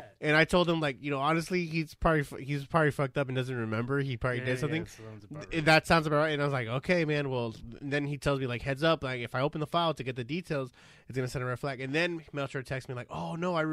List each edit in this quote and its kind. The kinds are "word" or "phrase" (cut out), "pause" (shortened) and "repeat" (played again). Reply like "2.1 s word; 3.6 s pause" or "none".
none

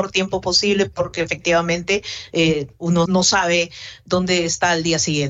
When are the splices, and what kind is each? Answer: 3.1 s word

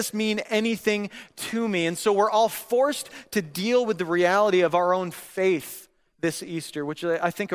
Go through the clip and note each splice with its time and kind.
none

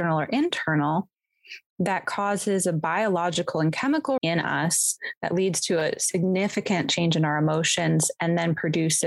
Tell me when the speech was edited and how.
4.2 s word

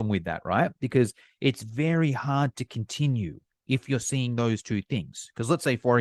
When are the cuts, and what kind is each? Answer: none

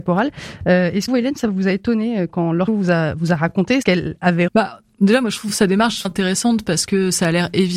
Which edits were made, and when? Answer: 1.1 s word; 2.3 s word; 2.7 s word; 3.8 s word; 4.5 s word; 6.0 s word

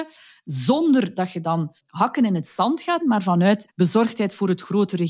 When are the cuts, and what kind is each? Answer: 1.8 s pause; 3.0 s word; 3.7 s word

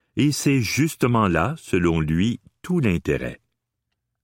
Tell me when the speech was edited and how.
none

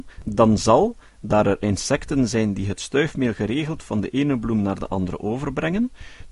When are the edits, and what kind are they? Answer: none

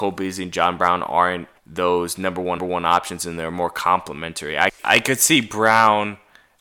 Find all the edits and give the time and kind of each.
1.6 s pause; 2.6 s repeat; 4.8 s word

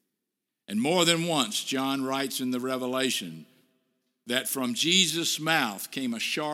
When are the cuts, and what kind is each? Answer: none

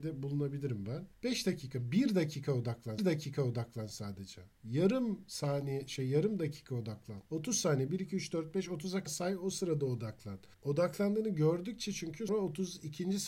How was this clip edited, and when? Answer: 1.1 s pause; 3.0 s repeat; 7.3 s pause; 9.1 s word; 10.5 s pause; 12.3 s word

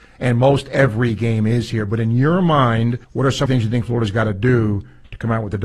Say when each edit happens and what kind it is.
3.0 s pause; 3.5 s phrase

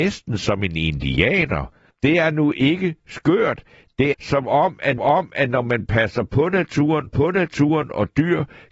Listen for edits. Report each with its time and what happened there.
1.9 s pause; 4.1 s word; 5.0 s repeat; 7.1 s repeat

